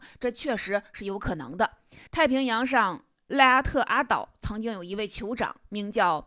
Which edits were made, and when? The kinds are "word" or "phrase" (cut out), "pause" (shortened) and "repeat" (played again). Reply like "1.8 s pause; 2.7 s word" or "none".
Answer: 2.1 s pause